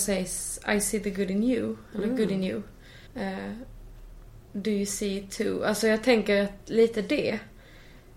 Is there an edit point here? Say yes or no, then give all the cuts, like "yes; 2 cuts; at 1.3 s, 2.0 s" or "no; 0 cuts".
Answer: yes; 1 cut; at 3.1 s